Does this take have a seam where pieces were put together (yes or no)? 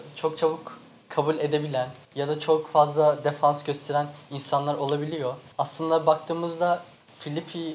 yes